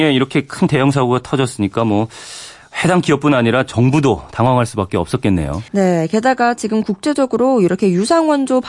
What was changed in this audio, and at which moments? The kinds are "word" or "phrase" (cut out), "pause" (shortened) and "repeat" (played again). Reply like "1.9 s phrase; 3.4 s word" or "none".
5.7 s pause